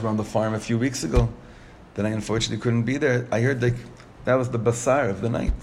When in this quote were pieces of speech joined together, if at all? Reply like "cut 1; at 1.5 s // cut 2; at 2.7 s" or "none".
none